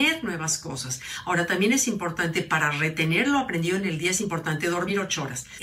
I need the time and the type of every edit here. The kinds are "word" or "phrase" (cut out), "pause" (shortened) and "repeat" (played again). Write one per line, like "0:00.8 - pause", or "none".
none